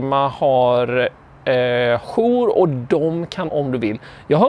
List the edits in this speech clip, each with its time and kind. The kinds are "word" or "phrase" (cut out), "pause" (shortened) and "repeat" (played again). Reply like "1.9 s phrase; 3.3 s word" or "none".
2.0 s word; 3.5 s phrase